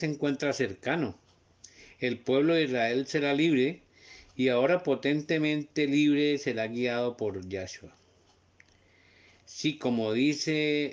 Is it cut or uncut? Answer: uncut